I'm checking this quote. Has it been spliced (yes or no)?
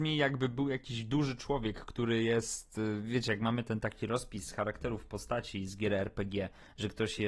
no